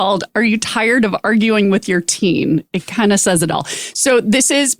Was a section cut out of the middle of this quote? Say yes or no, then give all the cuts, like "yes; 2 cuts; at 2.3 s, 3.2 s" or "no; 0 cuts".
no; 0 cuts